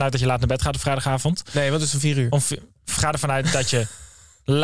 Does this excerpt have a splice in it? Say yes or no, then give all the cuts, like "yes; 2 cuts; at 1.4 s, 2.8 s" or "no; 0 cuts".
no; 0 cuts